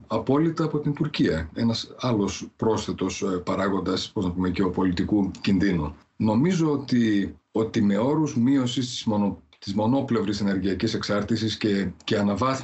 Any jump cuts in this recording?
no; 0 cuts

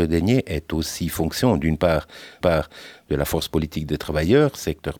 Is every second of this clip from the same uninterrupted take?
no; 1 cut; at 2.4 s

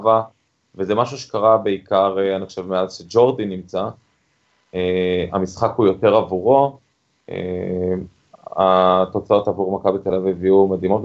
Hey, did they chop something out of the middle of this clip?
no; 0 cuts

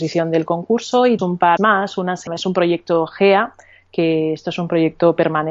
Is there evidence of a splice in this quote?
yes; 3 cuts; at 1.2 s, 1.6 s, 2.3 s

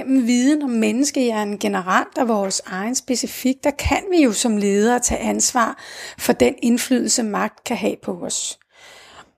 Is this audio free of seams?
yes; 0 cuts

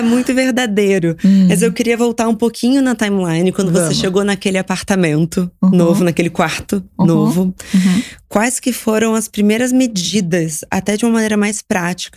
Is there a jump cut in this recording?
no; 0 cuts

